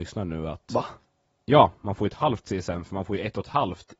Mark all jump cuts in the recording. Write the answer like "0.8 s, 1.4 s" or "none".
none